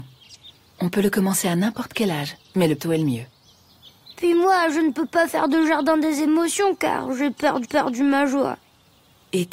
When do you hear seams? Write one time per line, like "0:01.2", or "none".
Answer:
0:02.4
0:02.8
0:07.6